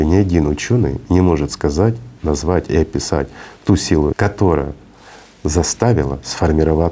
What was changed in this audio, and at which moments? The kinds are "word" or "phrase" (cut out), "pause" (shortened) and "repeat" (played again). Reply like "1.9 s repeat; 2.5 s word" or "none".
4.1 s word